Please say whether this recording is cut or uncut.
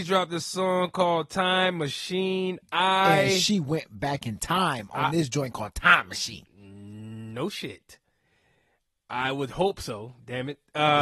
uncut